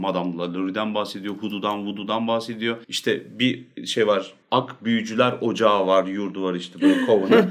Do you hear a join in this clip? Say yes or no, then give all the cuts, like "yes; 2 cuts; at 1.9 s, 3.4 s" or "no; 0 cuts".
yes; 2 cuts; at 2.8 s, 4.4 s